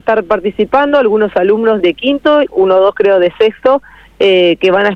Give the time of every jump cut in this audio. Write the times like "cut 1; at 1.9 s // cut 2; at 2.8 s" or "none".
cut 1; at 1.8 s // cut 2; at 2.4 s